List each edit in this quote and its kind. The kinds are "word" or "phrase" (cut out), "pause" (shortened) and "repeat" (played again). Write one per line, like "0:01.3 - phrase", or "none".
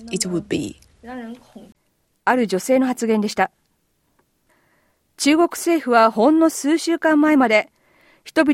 none